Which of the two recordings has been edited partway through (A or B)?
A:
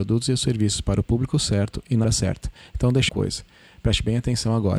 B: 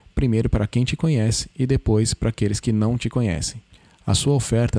A